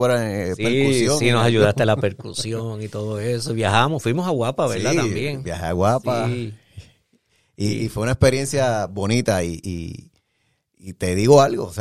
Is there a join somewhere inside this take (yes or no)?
no